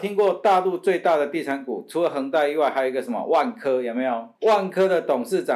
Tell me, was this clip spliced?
yes; 1 cut; at 4.3 s

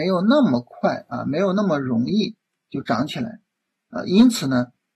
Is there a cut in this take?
no; 0 cuts

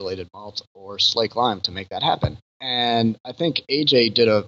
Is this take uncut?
no; 1 cut; at 2.5 s

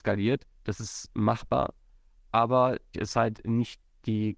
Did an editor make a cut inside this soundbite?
yes; 1 cut; at 2.9 s

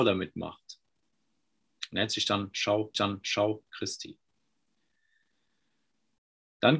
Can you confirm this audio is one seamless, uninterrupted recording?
no; 1 cut; at 2.9 s

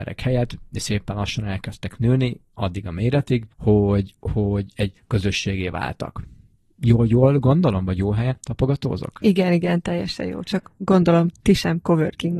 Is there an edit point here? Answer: yes; 1 cut; at 3.5 s

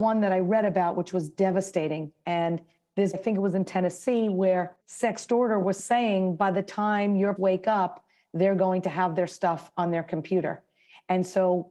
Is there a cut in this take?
yes; 3 cuts; at 3.1 s, 4.8 s, 7.4 s

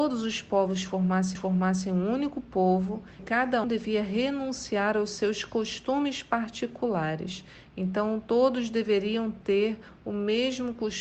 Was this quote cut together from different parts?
yes; 3 cuts; at 1.3 s, 3.2 s, 3.6 s

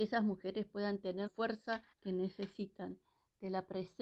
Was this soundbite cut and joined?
yes; 2 cuts; at 1.3 s, 1.9 s

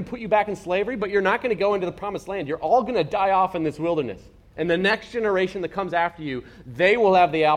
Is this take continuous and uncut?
yes; 0 cuts

